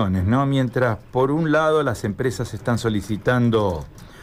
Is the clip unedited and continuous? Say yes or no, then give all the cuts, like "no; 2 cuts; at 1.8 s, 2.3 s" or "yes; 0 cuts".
yes; 0 cuts